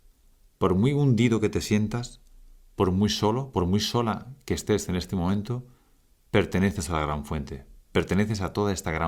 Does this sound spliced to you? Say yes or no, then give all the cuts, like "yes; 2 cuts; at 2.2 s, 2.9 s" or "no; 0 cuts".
no; 0 cuts